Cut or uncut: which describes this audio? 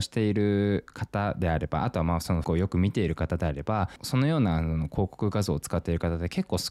cut